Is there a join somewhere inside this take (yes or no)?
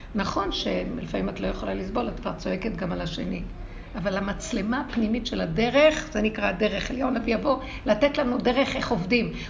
no